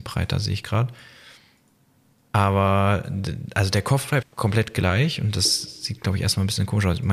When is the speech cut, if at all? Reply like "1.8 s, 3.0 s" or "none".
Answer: 4.2 s